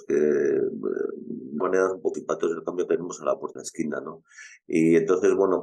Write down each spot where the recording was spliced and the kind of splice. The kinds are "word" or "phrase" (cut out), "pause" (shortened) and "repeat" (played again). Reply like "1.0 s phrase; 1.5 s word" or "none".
1.6 s word; 2.1 s word; 2.9 s word; 3.6 s word

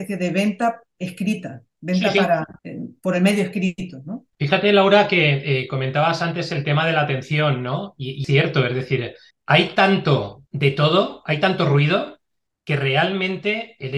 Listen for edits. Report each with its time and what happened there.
2.6 s pause; 4.3 s pause; 8.2 s phrase; 9.3 s pause; 10.5 s pause

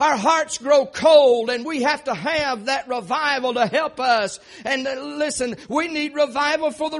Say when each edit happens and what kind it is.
none

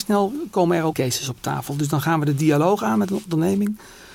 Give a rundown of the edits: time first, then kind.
0.9 s word

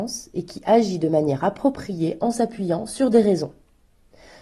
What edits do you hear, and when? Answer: none

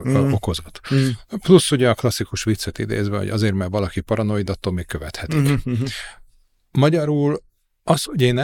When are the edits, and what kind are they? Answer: none

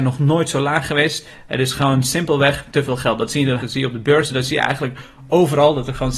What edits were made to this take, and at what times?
3.6 s word

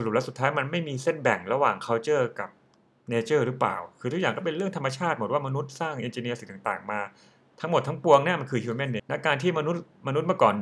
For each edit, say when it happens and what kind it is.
9.0 s word

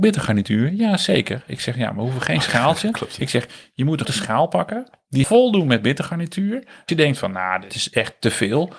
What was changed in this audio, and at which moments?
4.0 s word; 5.2 s word; 6.9 s word; 7.7 s word

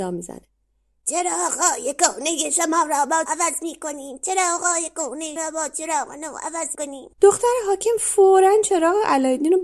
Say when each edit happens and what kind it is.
3.3 s phrase; 5.4 s word; 6.7 s word; 7.1 s pause

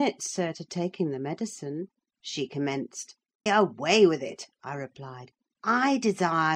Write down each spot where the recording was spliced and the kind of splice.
3.5 s word

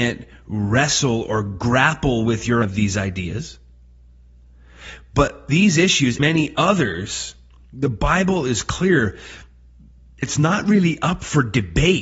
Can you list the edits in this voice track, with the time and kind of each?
2.6 s word; 5.5 s word; 6.2 s word; 10.2 s word

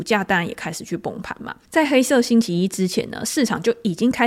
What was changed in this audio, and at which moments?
1.6 s pause

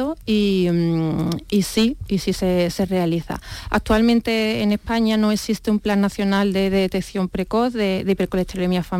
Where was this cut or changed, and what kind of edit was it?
none

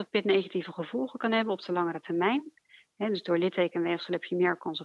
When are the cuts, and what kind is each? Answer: none

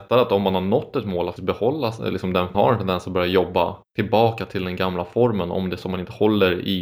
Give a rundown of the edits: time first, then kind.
1.4 s word; 2.5 s phrase; 3.9 s pause

